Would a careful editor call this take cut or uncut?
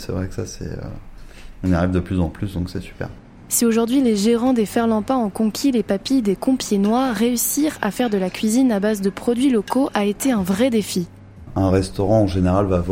uncut